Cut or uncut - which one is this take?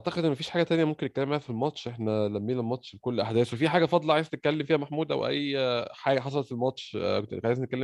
uncut